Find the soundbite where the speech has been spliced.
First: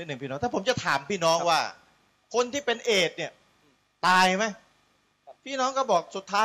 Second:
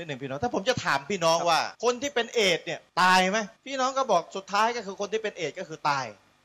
second; 3 cuts; at 1.7 s, 2.9 s, 3.6 s

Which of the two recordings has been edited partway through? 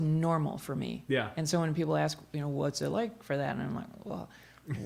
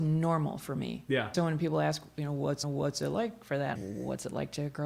second; 3 cuts; at 1.3 s, 2.6 s, 3.8 s

